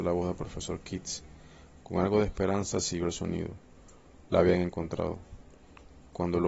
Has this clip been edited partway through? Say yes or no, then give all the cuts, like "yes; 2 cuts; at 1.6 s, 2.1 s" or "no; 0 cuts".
no; 0 cuts